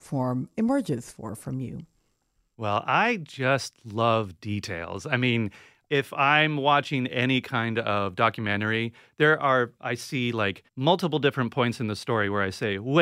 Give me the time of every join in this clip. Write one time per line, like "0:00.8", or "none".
0:10.7